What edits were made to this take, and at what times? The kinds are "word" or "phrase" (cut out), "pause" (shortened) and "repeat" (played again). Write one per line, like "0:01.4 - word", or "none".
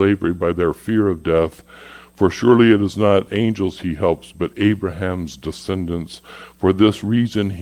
none